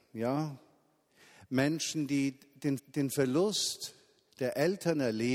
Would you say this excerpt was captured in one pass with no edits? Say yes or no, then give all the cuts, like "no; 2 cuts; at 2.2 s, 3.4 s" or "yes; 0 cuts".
no; 1 cut; at 2.8 s